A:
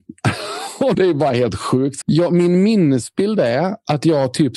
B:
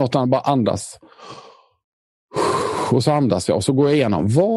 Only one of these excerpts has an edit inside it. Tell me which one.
A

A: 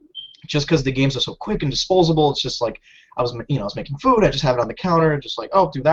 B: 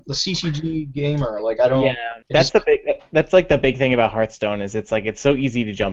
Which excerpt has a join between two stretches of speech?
B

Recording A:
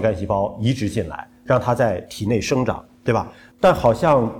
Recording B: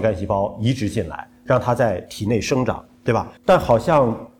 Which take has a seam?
B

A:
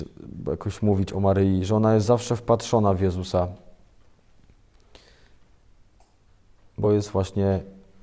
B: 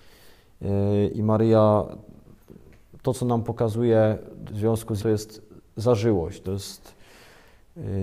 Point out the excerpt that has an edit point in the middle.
B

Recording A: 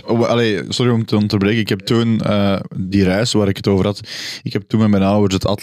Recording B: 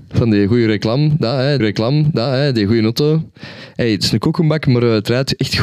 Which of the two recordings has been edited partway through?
B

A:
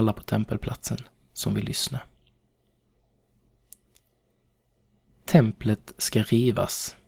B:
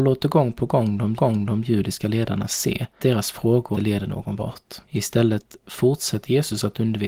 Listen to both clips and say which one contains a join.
B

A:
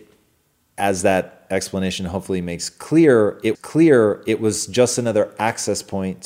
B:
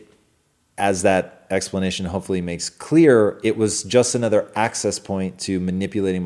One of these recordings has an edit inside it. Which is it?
A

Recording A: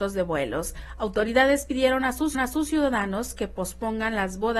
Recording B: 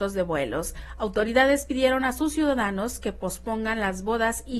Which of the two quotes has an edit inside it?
A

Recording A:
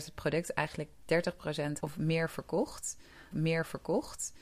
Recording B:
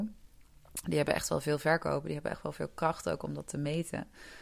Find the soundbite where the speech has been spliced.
A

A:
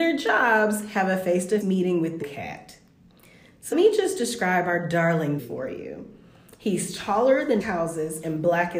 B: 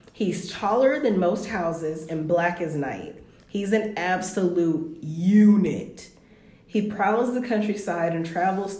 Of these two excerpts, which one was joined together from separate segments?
A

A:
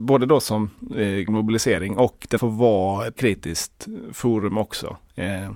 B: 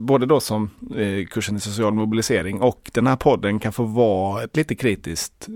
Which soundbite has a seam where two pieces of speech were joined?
A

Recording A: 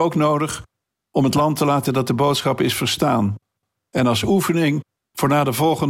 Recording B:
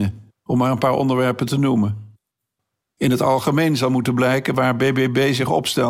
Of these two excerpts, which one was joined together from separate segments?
A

